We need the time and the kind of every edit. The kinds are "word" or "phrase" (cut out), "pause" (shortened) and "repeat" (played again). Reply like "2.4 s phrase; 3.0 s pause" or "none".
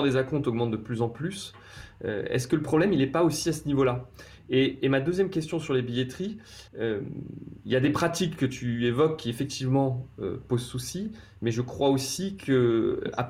6.7 s pause